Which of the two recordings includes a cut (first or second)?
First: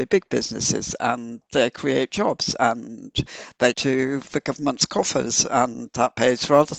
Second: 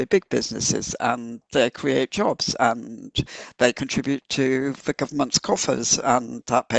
first